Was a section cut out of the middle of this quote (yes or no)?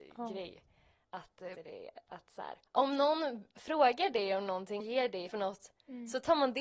yes